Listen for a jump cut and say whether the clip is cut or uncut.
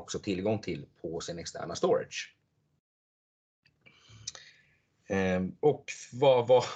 uncut